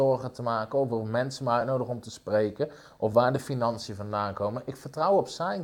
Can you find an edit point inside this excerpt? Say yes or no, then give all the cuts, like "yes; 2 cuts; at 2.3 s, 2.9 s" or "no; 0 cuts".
no; 0 cuts